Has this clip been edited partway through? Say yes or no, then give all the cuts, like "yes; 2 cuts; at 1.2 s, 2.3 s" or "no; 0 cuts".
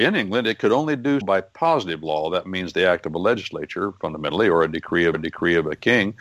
yes; 2 cuts; at 1.2 s, 5.1 s